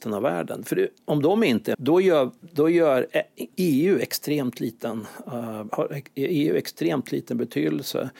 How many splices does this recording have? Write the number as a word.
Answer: four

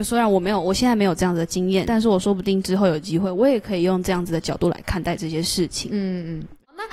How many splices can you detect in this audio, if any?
one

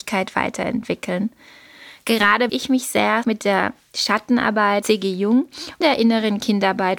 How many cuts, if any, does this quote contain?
four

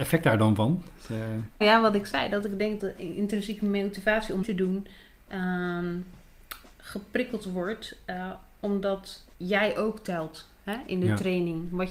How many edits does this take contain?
four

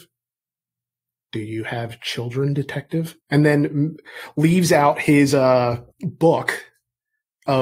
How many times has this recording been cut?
two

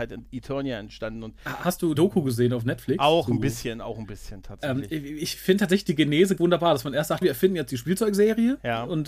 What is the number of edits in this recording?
three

